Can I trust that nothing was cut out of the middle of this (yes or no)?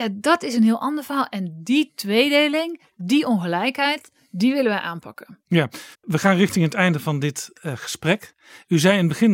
no